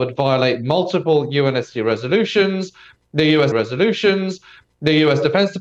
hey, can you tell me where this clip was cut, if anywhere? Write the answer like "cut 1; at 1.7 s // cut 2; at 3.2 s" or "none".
cut 1; at 3.5 s